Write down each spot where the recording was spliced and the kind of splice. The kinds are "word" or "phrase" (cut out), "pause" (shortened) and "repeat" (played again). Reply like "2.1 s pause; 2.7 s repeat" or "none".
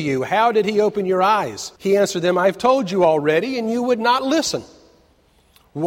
1.8 s pause